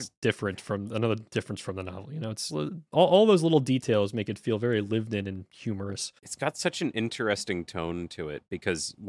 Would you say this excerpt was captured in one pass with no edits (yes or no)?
no